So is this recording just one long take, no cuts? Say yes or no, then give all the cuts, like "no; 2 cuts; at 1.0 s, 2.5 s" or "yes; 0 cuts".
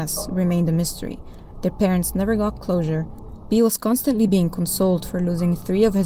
yes; 0 cuts